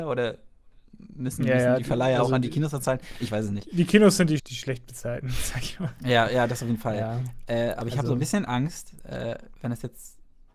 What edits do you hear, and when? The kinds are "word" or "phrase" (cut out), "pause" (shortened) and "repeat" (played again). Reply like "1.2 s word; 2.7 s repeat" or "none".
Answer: 4.4 s word